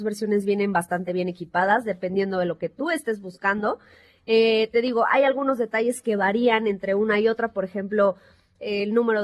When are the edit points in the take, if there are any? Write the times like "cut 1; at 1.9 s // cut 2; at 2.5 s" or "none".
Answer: none